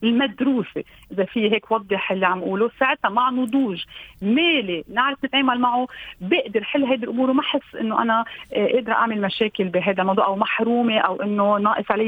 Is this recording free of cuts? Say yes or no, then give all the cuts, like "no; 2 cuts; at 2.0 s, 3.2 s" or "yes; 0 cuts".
yes; 0 cuts